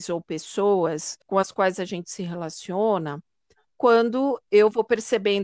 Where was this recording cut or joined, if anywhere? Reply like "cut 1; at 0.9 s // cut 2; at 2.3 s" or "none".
cut 1; at 1.2 s